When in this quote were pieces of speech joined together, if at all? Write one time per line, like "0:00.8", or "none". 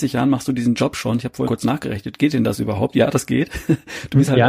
0:01.5